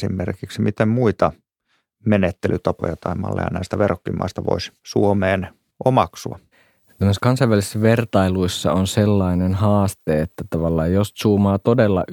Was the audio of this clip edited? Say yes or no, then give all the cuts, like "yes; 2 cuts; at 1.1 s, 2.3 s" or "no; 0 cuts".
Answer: yes; 1 cut; at 6.5 s